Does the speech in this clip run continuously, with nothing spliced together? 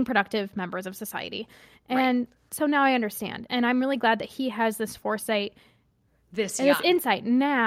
yes; 0 cuts

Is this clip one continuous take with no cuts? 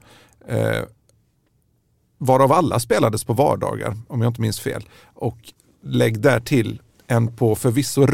yes; 0 cuts

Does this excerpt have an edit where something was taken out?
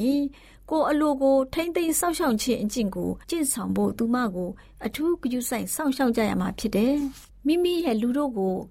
yes; 1 cut; at 3.2 s

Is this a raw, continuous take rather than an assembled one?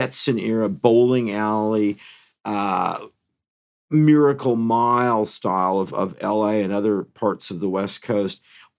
yes; 0 cuts

